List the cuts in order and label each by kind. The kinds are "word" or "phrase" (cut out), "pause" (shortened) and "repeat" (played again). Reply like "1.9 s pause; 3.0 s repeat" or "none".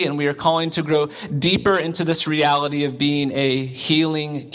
none